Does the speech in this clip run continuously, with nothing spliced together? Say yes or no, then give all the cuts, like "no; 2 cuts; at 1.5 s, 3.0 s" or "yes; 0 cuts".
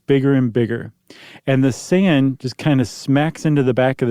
yes; 0 cuts